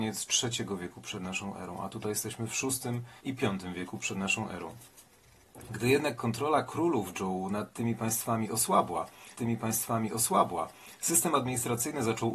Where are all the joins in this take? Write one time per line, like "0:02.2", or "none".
0:03.2
0:09.3